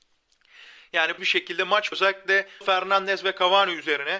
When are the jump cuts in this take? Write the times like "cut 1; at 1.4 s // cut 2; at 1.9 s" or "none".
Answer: cut 1; at 1.2 s // cut 2; at 1.9 s // cut 3; at 2.6 s